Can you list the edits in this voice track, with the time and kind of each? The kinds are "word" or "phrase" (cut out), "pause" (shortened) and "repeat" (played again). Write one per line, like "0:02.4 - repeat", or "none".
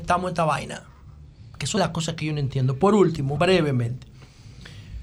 0:01.8 - word
0:03.4 - word